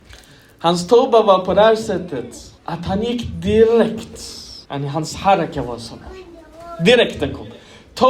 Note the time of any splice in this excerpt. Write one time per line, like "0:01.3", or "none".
0:02.6
0:04.6